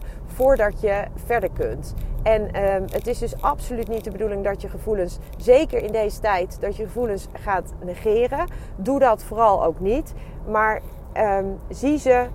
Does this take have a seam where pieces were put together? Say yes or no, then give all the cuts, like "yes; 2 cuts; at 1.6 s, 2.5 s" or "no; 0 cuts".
no; 0 cuts